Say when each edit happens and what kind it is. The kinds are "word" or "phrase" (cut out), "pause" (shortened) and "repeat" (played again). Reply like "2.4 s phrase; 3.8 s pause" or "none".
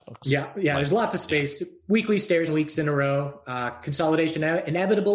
2.5 s phrase

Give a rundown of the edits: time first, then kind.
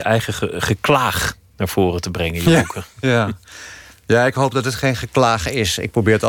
none

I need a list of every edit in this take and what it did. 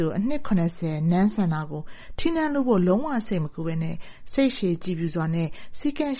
none

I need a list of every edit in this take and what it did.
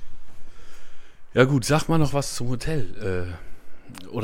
none

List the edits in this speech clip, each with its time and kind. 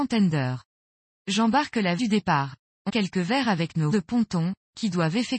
2.0 s word; 2.9 s word; 3.9 s word

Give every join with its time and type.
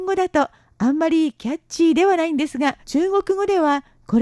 2.8 s pause

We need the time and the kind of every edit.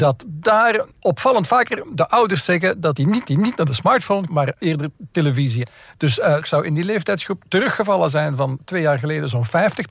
0.9 s pause; 3.3 s repeat; 4.3 s word; 6.4 s word; 8.6 s word

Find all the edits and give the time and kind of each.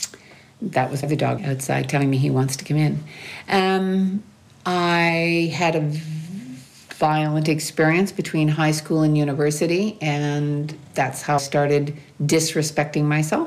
1.0 s word; 1.4 s word; 4.5 s pause; 10.8 s word; 11.4 s word

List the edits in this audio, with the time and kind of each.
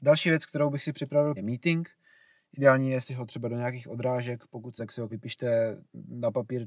1.4 s word; 3.0 s word; 4.8 s word; 5.1 s word

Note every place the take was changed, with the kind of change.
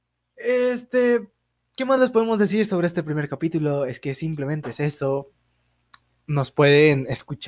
none

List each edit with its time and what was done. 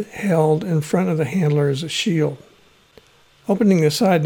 none

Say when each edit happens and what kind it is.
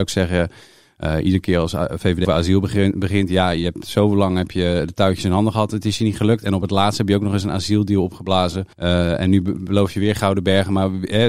2.2 s word; 8.7 s pause

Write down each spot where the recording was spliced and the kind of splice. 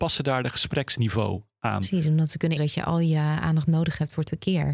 2.6 s word

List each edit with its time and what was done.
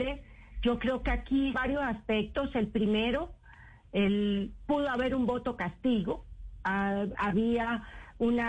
1.5 s phrase

